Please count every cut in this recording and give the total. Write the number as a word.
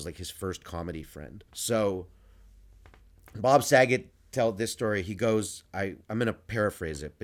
two